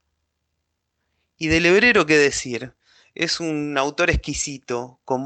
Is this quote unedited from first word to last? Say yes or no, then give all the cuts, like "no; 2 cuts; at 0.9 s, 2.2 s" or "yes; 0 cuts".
yes; 0 cuts